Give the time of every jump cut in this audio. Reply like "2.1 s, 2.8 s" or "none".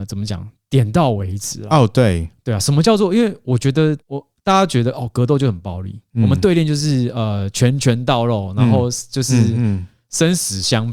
4.0 s